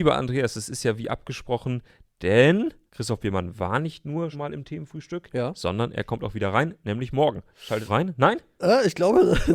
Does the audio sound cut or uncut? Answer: cut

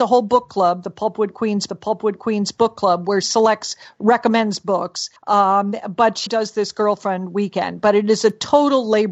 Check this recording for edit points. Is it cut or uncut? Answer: cut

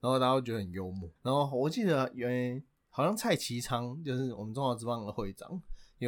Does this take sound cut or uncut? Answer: cut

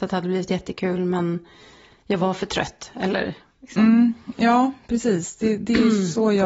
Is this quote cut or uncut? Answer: uncut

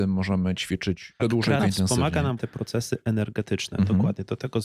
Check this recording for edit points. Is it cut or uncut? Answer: cut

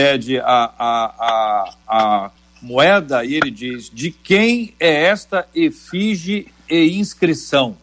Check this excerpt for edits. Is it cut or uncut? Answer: uncut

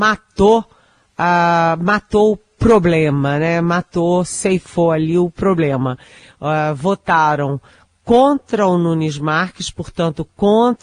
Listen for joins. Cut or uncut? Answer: uncut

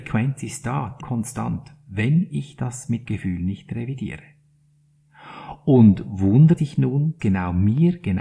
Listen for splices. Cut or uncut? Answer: cut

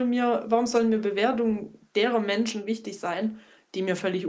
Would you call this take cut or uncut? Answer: uncut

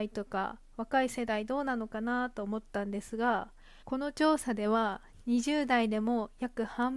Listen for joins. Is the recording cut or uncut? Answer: cut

